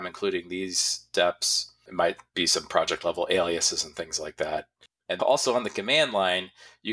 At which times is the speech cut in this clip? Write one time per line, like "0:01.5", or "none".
0:05.2